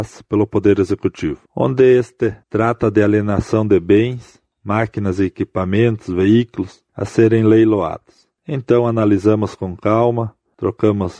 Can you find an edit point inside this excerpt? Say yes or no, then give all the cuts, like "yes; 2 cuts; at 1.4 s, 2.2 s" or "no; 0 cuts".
yes; 3 cuts; at 1.5 s, 2.4 s, 6.9 s